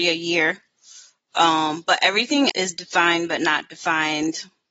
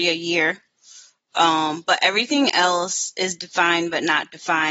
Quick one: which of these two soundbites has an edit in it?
first; 1 cut; at 2.5 s

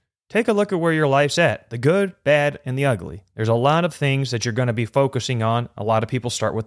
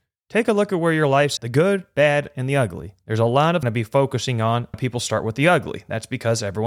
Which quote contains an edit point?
second; 3 cuts; at 1.4 s, 3.6 s, 4.7 s

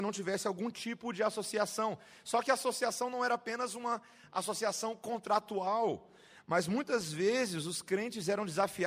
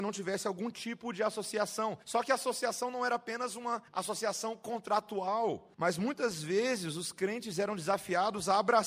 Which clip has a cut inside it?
second; 3 cuts; at 2.0 s, 3.9 s, 5.7 s

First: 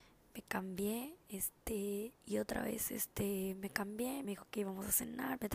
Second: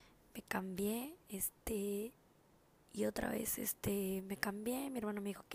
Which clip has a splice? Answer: first; 2 cuts; at 2.2 s, 4.2 s

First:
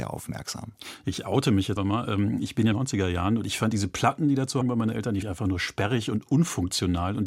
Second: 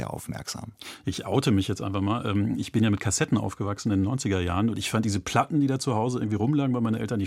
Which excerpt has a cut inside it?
first; 4 cuts; at 1.8 s, 2.7 s, 4.6 s, 5.2 s

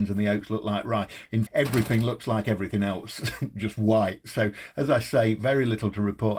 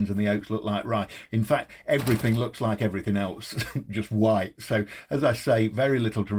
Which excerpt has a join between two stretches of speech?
first; 1 cut; at 1.5 s

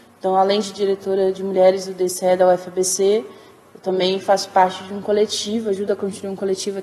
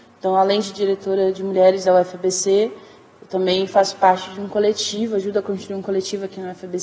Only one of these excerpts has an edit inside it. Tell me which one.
second; 1 cut; at 1.8 s

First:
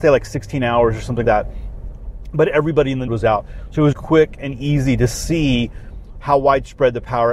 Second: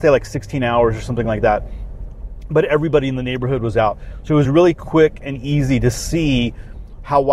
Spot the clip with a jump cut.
first; 3 cuts; at 1.2 s, 3.1 s, 3.9 s

